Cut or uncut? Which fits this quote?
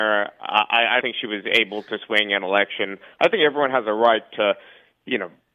cut